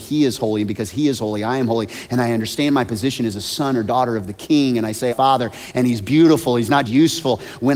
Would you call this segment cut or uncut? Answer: cut